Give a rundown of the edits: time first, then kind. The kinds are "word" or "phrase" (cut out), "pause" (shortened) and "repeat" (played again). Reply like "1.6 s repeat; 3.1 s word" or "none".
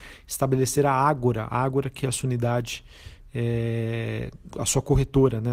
none